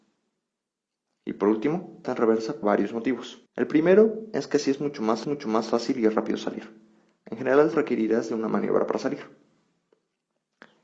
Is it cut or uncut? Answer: cut